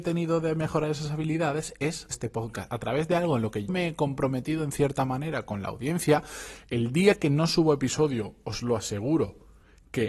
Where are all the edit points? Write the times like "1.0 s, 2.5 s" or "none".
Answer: 2.1 s, 3.7 s